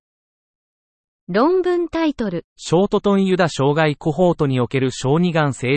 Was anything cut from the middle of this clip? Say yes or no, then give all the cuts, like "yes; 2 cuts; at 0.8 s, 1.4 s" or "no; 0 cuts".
yes; 1 cut; at 2.5 s